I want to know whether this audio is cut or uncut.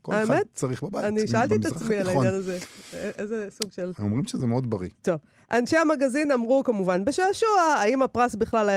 uncut